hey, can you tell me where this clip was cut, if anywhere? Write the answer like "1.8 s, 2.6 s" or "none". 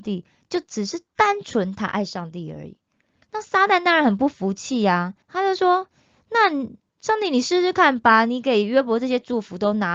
5.2 s